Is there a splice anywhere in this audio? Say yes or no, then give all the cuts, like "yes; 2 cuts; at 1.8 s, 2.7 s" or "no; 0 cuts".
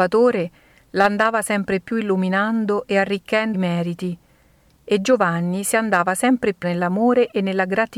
yes; 2 cuts; at 3.5 s, 6.6 s